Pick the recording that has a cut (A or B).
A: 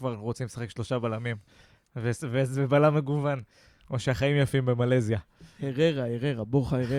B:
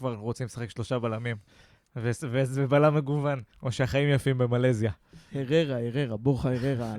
B